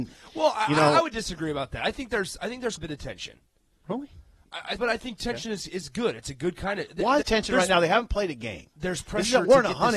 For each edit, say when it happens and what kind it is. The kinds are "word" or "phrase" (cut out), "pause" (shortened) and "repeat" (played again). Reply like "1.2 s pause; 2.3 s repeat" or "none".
2.8 s word; 4.8 s word; 7.2 s word

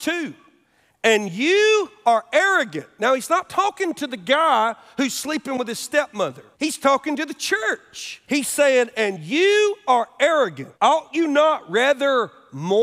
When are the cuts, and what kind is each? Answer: 6.5 s pause; 8.2 s pause; 10.7 s pause

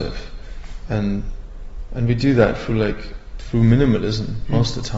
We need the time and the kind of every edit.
none

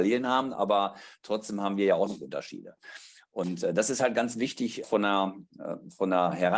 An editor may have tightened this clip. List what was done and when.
4.8 s word

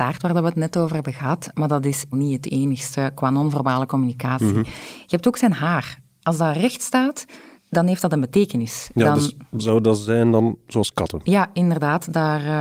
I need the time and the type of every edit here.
7.6 s word

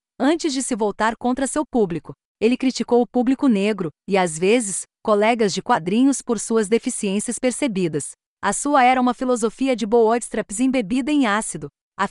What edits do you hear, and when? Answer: none

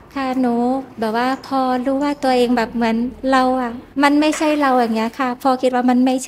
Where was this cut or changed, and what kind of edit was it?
3.9 s pause

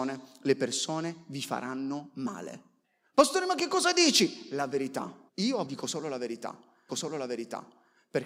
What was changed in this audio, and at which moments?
2.8 s pause; 5.3 s pause; 5.7 s word; 6.9 s repeat

